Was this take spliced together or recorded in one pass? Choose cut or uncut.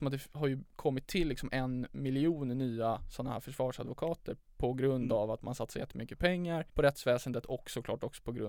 uncut